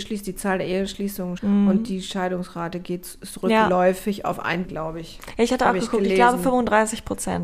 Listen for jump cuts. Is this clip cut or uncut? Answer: cut